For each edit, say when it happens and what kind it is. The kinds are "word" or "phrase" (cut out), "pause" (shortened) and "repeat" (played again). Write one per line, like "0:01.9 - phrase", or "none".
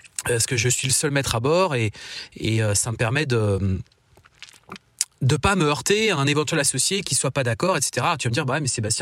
0:05.1 - pause